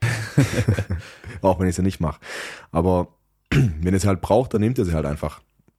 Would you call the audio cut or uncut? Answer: uncut